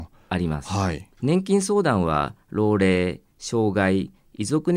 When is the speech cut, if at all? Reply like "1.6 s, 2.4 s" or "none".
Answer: 1.1 s

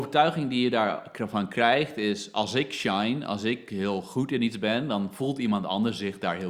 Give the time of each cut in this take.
none

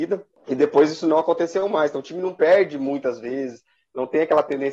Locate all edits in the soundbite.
none

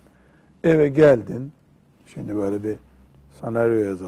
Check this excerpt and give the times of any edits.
none

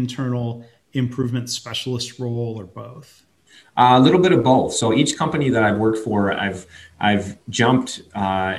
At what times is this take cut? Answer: none

